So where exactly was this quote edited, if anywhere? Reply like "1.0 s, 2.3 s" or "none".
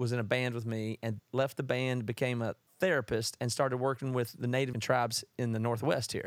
1.2 s, 2.7 s, 4.7 s